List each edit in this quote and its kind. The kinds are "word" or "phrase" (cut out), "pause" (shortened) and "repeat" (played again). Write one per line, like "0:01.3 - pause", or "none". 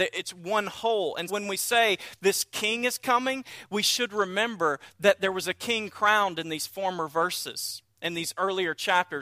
0:01.3 - word